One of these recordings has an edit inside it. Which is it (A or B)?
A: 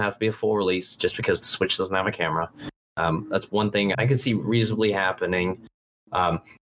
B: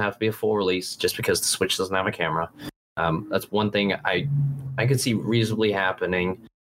A